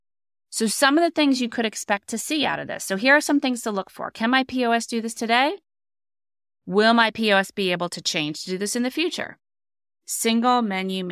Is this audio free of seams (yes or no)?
yes